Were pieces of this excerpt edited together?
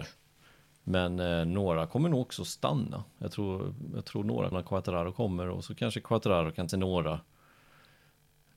yes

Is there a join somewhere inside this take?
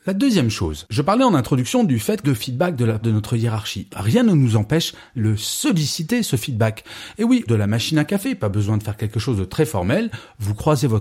yes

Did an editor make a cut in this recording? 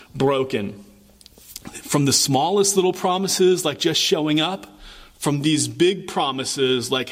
no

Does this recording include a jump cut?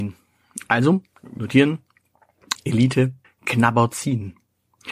yes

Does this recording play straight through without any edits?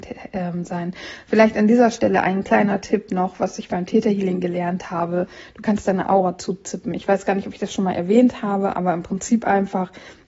yes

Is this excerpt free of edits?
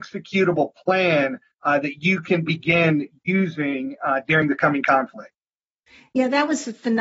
yes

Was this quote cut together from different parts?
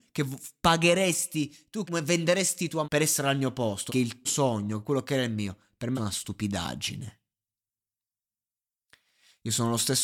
yes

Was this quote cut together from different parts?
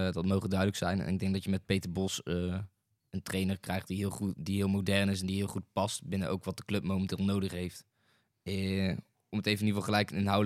no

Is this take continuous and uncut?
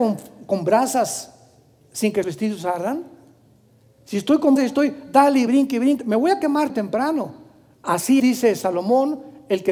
no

